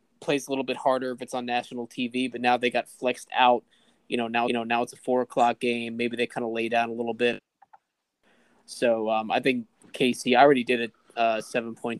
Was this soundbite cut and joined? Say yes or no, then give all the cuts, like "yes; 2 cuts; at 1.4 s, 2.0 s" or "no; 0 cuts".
yes; 1 cut; at 4.5 s